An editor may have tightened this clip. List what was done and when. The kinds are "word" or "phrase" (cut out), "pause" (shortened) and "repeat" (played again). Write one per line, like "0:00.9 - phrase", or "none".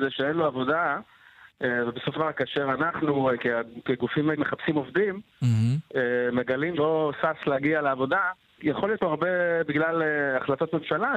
0:02.2 - word
0:04.4 - word
0:06.8 - word
0:08.6 - word
0:09.0 - word